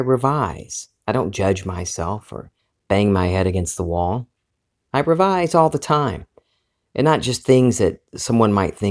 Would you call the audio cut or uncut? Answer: cut